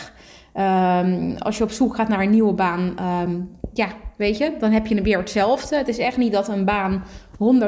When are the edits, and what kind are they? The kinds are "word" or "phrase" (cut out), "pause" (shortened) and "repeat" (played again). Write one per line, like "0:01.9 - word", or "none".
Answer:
none